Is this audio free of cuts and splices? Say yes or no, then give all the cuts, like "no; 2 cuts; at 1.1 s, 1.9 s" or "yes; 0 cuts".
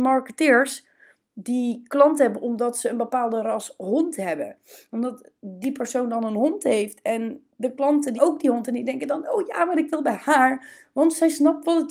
no; 1 cut; at 8.2 s